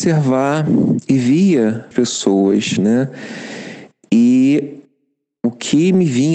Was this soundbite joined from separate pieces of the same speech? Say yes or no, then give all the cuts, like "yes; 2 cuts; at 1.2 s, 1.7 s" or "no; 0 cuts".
yes; 1 cut; at 1.9 s